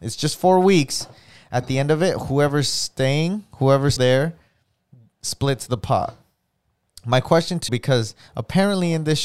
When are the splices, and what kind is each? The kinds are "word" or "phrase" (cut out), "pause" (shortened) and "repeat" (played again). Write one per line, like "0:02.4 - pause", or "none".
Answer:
0:04.0 - word
0:07.7 - word